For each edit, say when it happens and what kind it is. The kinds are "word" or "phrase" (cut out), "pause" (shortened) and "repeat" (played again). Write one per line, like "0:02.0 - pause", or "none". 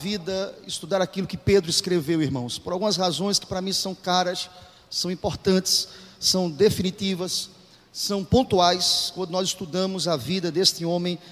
none